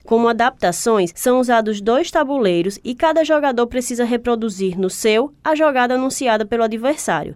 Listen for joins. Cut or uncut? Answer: uncut